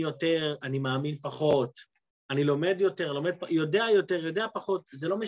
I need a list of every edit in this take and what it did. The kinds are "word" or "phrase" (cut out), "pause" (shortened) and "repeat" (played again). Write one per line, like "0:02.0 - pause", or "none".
none